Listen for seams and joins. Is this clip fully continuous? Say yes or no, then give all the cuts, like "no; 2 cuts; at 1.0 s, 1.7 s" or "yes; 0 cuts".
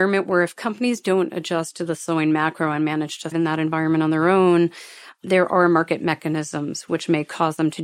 no; 1 cut; at 3.3 s